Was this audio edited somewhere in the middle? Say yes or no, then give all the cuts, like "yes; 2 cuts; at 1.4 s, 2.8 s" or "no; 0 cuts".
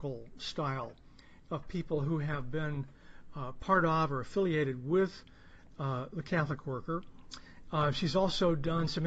no; 0 cuts